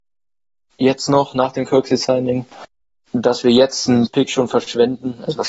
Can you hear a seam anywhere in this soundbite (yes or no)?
yes